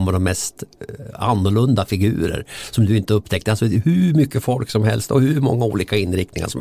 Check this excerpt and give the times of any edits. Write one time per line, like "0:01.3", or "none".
none